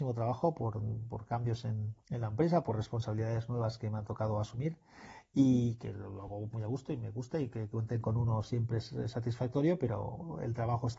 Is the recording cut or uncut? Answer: cut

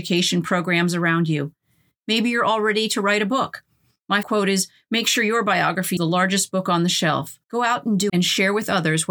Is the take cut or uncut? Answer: cut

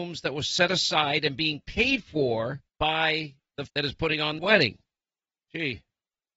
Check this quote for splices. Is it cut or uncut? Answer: cut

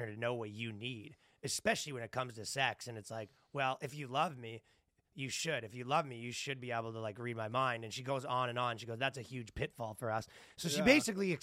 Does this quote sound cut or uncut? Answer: uncut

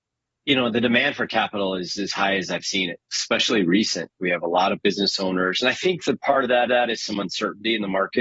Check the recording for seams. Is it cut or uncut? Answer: cut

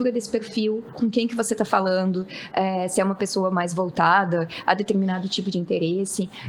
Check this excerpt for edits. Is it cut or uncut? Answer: uncut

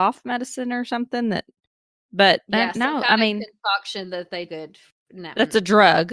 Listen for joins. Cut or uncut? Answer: cut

